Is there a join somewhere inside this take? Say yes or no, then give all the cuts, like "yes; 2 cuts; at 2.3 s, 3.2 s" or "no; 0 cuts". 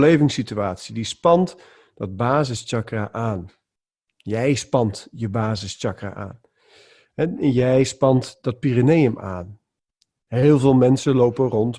no; 0 cuts